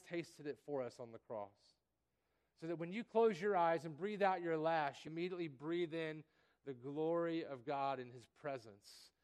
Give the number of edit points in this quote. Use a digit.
1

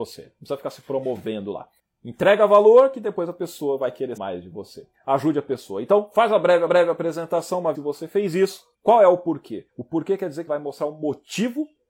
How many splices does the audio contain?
8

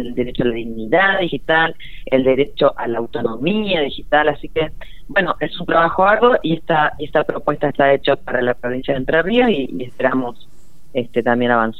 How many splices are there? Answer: 0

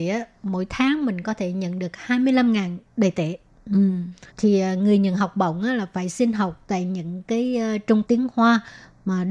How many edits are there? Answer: 2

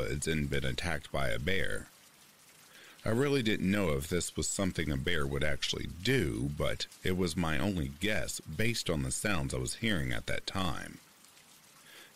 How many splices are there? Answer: 0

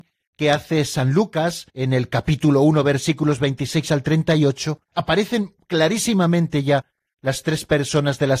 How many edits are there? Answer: 2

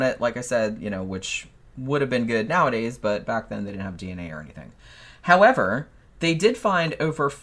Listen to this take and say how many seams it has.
0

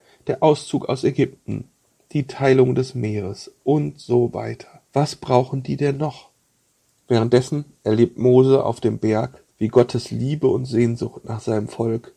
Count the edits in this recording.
2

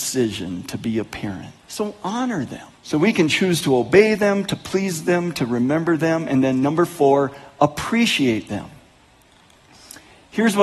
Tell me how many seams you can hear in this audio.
2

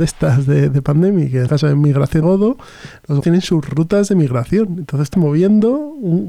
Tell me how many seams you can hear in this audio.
4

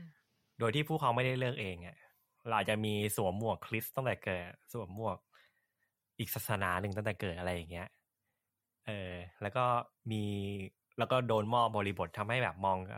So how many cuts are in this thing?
0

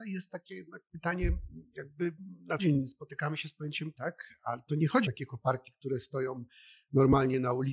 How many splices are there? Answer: 3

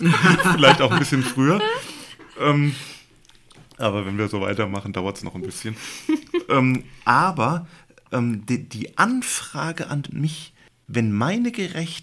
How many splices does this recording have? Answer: 0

